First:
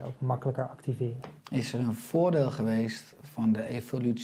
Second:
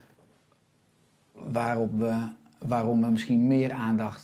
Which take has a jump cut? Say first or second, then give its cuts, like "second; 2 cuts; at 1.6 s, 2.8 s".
first; 1 cut; at 1.4 s